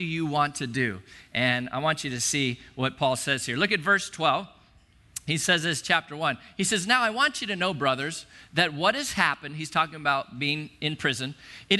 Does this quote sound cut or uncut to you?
uncut